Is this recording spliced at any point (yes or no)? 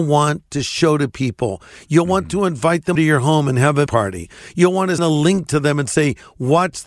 yes